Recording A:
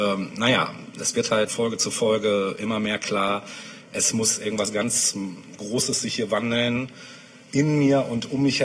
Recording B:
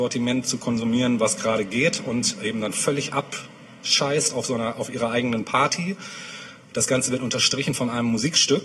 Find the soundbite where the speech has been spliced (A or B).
A